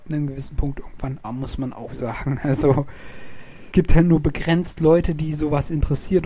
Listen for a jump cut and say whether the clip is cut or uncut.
cut